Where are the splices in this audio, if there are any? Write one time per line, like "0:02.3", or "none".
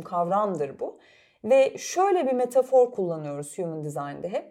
none